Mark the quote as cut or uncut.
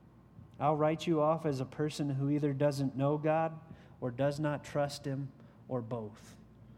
uncut